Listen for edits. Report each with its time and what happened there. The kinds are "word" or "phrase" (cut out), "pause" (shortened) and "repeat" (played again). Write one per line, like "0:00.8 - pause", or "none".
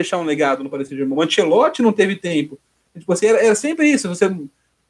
none